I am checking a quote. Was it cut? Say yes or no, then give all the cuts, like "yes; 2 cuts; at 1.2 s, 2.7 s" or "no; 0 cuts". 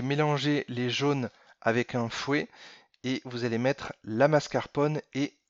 no; 0 cuts